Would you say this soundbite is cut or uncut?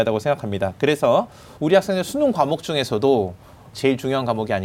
cut